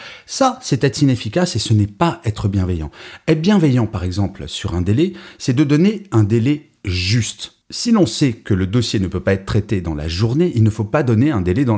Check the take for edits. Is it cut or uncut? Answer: uncut